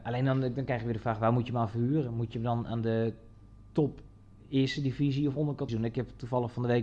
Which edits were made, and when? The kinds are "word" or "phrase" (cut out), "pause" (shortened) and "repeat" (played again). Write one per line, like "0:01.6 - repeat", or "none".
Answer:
0:05.7 - word